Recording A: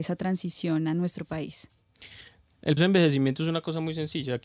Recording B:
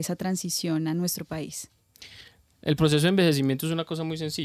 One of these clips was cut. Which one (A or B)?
A